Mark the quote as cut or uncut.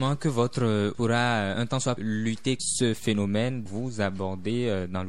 cut